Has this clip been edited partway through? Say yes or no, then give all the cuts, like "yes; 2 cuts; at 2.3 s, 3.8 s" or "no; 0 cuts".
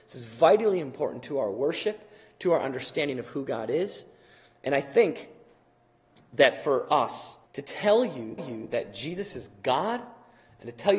yes; 2 cuts; at 7.4 s, 8.4 s